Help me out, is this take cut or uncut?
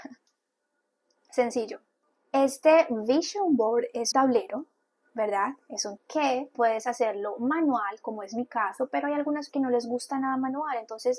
cut